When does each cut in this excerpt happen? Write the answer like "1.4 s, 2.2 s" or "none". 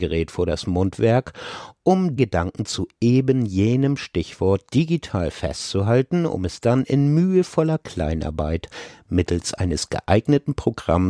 2.2 s

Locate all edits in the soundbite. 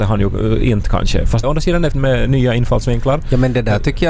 1.4 s, 1.9 s

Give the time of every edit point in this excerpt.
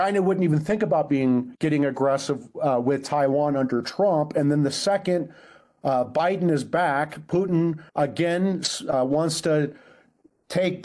7.9 s

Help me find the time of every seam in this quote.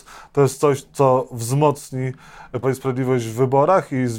2.6 s

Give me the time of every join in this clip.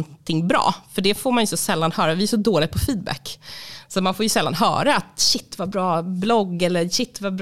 none

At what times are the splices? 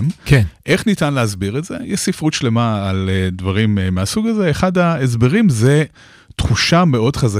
none

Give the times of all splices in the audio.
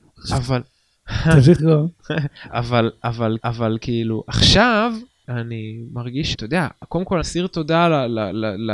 1.6 s, 2.5 s, 3.4 s, 5.2 s, 6.3 s, 7.2 s

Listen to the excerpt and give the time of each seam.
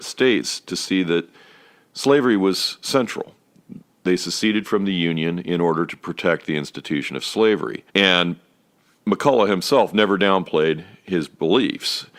7.9 s

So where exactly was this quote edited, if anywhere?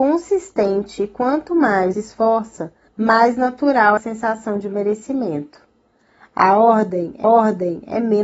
1.9 s, 2.9 s, 4.0 s, 7.2 s

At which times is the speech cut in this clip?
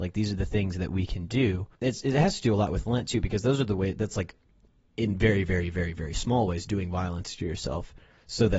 1.7 s

